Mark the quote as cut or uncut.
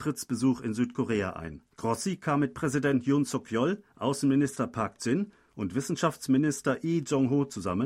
cut